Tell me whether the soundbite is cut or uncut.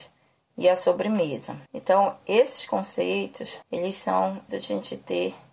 cut